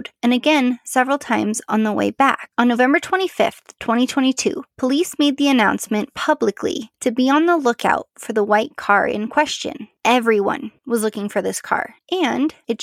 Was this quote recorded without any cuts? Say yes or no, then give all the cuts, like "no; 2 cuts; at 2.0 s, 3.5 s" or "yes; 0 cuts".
yes; 0 cuts